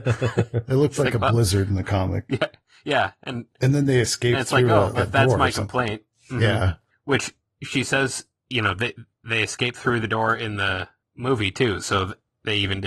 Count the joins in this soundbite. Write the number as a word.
one